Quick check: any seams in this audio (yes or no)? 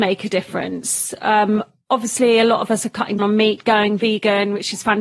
yes